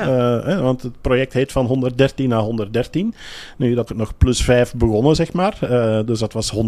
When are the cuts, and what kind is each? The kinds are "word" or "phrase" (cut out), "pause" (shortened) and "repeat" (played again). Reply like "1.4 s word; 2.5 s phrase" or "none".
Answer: 3.9 s phrase

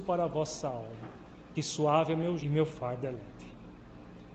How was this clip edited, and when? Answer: 1.5 s word; 2.4 s word

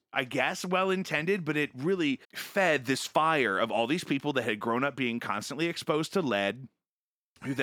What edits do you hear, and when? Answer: 2.2 s pause

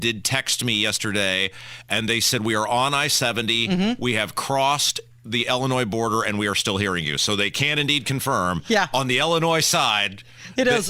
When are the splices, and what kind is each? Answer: none

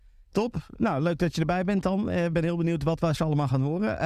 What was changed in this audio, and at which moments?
2.3 s word; 3.2 s word

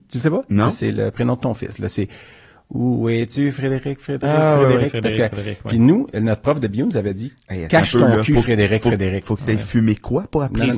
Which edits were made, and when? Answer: none

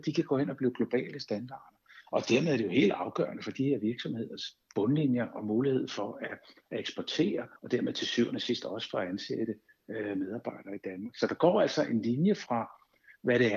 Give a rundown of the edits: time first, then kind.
7.6 s pause

